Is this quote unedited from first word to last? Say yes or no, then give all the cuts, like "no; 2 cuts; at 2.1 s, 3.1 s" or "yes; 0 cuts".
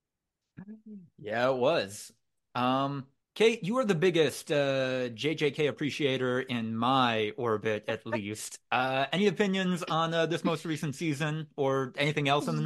no; 1 cut; at 3.2 s